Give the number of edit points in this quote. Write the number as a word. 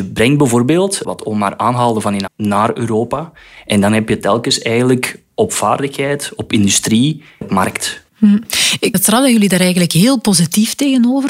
four